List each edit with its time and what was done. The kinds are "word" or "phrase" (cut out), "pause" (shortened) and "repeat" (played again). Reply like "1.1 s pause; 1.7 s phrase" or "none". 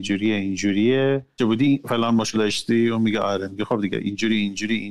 1.4 s phrase; 2.3 s word